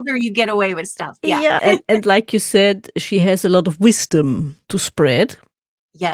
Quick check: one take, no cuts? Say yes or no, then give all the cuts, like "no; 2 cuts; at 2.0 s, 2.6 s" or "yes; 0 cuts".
no; 1 cut; at 1.6 s